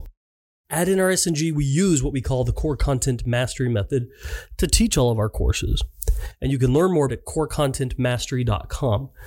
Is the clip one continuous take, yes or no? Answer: no